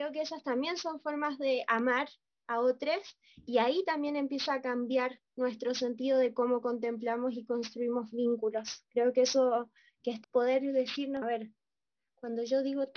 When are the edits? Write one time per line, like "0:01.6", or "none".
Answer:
0:10.2
0:11.2